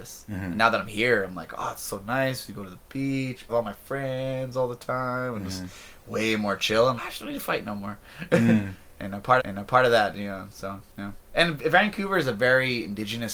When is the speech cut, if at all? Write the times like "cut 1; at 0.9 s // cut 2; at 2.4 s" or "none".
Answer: cut 1; at 3.5 s // cut 2; at 7.0 s // cut 3; at 9.4 s